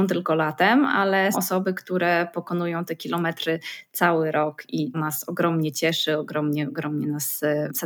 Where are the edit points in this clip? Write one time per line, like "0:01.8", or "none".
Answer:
0:01.3
0:04.9